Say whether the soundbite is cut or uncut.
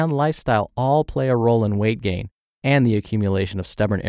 uncut